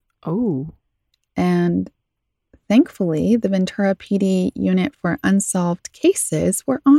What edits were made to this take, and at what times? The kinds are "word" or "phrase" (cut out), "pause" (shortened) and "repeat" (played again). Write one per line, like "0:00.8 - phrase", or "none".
none